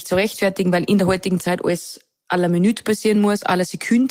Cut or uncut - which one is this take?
uncut